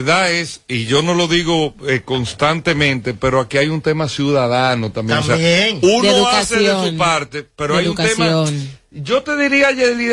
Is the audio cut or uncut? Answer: uncut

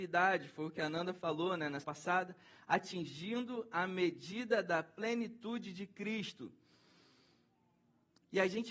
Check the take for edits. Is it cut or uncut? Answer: cut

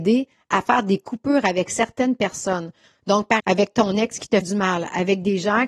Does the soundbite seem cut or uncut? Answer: cut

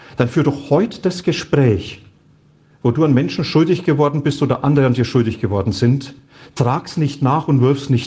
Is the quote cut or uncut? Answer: uncut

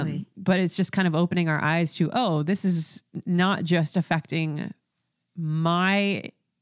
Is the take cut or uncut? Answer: uncut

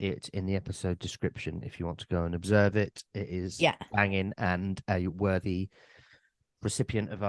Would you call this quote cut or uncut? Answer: uncut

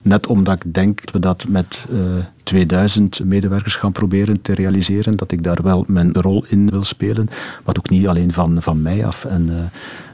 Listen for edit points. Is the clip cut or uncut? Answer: cut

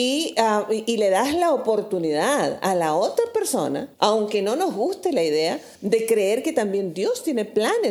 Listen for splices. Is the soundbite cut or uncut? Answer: cut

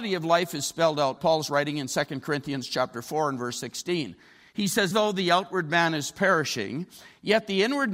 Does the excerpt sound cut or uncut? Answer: cut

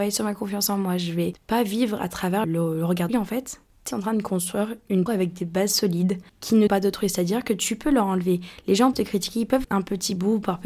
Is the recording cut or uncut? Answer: cut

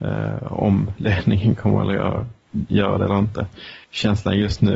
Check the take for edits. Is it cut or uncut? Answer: cut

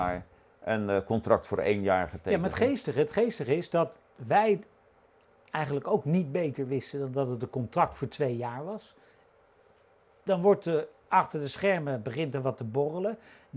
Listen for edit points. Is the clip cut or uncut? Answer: uncut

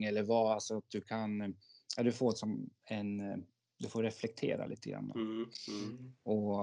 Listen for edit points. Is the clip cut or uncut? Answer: uncut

